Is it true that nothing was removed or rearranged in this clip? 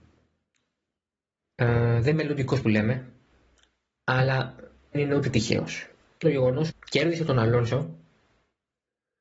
no; 5 cuts; at 2.1 s, 2.6 s, 4.9 s, 6.2 s, 6.7 s

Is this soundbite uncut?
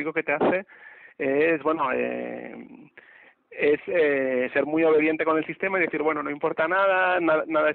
yes; 0 cuts

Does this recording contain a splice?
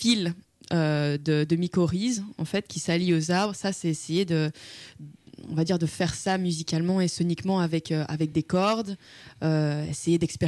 no; 0 cuts

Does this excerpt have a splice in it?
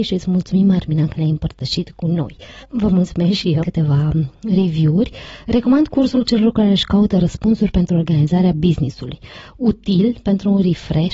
yes; 2 cuts; at 2.6 s, 3.6 s

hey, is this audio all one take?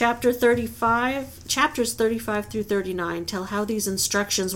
yes; 0 cuts

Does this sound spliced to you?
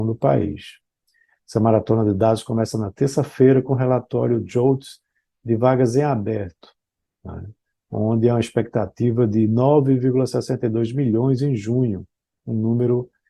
no; 0 cuts

